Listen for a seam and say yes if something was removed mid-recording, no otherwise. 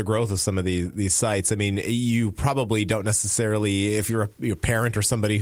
no